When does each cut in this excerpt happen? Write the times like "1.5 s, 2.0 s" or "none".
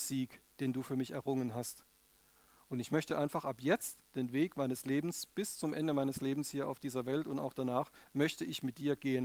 none

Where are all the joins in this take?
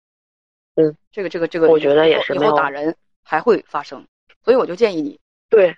none

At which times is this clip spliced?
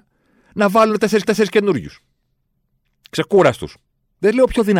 1.2 s

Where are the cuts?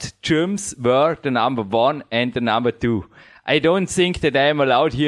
none

